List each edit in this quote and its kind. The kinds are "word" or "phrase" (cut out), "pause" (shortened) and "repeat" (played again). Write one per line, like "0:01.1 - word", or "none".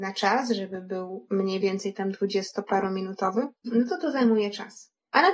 none